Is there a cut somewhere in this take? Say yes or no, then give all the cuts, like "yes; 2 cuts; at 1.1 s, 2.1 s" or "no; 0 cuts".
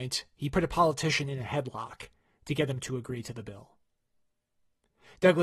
no; 0 cuts